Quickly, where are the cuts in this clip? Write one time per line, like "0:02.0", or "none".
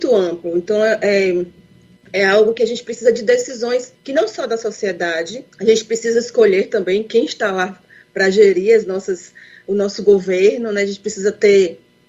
0:03.9
0:05.5